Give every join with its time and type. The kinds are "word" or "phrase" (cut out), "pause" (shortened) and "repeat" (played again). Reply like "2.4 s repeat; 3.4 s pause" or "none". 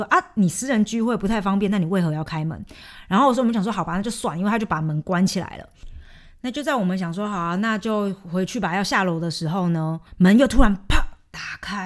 10.1 s pause